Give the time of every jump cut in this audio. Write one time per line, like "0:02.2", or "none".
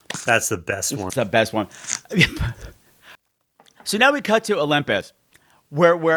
0:01.1